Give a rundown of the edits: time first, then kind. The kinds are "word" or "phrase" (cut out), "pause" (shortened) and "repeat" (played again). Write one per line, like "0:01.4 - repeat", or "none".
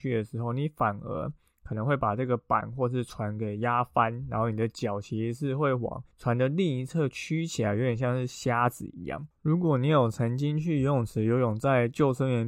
none